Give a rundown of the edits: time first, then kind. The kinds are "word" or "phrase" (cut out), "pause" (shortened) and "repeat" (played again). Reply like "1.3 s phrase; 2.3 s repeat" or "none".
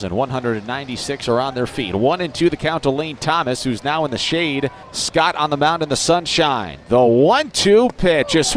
none

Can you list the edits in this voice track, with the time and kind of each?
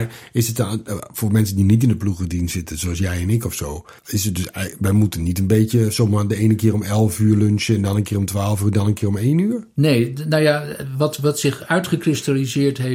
4.0 s pause

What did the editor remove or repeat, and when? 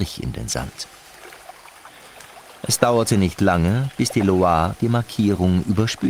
none

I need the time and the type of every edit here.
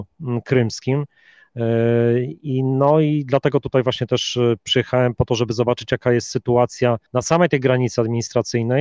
7.1 s pause

